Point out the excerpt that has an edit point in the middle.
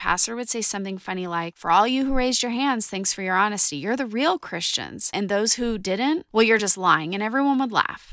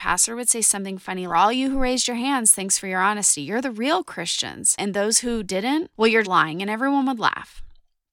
second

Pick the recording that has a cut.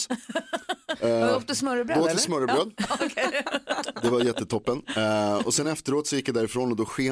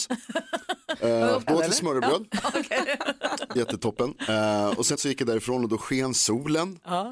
second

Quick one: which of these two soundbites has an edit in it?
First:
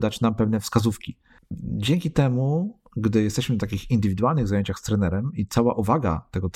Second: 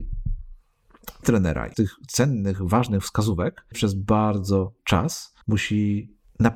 second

